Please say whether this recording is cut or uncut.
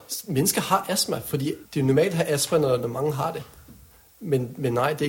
cut